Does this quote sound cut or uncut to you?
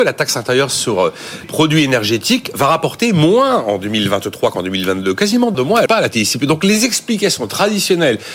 cut